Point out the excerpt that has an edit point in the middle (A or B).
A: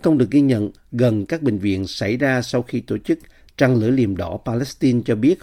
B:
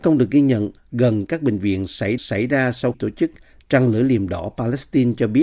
B